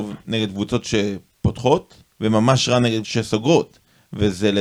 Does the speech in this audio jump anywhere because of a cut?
yes; 2 cuts; at 2.1 s, 3.0 s

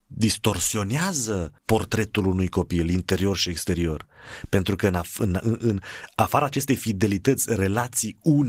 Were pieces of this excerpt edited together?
yes; 2 cuts; at 1.6 s, 5.4 s

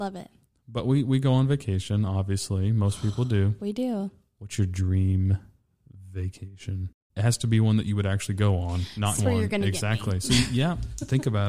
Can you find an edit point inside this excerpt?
yes; 1 cut; at 9.2 s

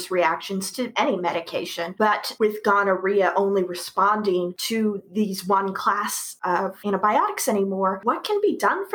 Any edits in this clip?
no; 0 cuts

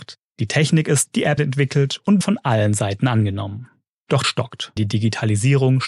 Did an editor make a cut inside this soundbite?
yes; 5 cuts; at 1.1 s, 1.4 s, 2.2 s, 4.2 s, 4.8 s

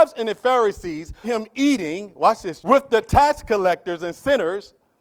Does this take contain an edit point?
yes; 2 cuts; at 1.2 s, 2.6 s

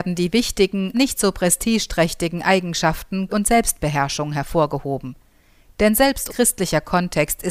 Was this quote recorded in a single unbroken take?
no; 3 cuts; at 0.9 s, 3.3 s, 6.3 s

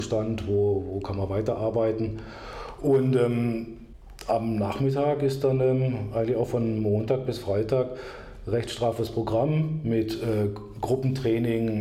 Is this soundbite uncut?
yes; 0 cuts

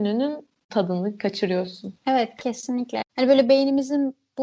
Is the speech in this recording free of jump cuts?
no; 1 cut; at 2.0 s

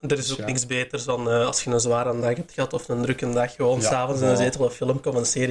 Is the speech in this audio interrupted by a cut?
no; 0 cuts

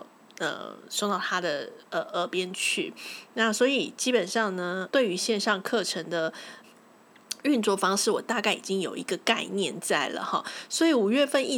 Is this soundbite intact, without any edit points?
no; 2 cuts; at 4.9 s, 6.6 s

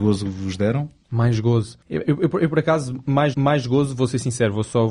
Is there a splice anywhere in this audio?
yes; 2 cuts; at 1.8 s, 3.3 s

